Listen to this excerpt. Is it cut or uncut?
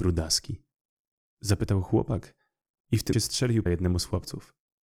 cut